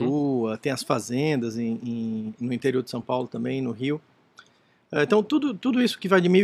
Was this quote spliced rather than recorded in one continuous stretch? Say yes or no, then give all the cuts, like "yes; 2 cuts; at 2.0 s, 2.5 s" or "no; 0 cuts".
no; 0 cuts